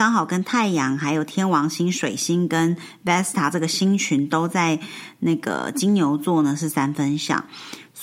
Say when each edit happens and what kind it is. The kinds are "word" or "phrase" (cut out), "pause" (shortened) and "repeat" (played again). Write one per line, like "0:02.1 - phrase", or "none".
none